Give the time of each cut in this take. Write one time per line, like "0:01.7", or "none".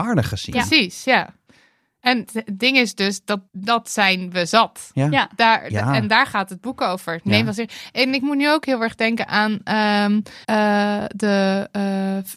0:02.3
0:03.5
0:10.4